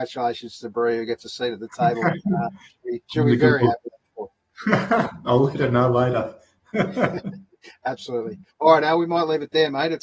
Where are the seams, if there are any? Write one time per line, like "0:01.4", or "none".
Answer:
0:03.0
0:08.5